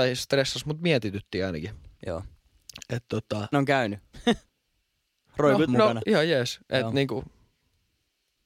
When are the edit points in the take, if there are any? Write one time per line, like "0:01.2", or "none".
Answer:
0:03.5
0:04.5
0:05.7
0:06.0